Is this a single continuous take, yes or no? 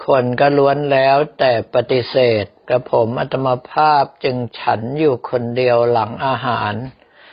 no